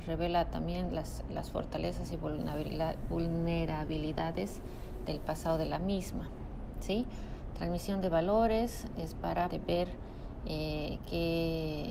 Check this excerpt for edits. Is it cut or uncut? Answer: cut